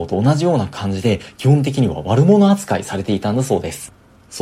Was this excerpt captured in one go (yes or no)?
yes